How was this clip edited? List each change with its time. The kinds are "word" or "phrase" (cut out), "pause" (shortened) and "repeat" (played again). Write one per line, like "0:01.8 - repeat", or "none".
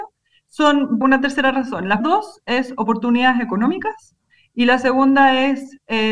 0:01.0 - phrase
0:02.0 - word